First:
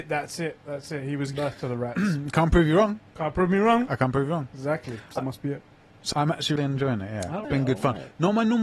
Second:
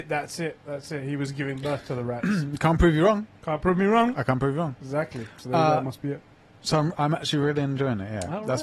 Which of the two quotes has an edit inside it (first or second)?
first